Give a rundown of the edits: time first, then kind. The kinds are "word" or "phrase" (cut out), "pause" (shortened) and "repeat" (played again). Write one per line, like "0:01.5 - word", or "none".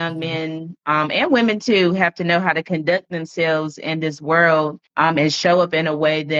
0:04.9 - pause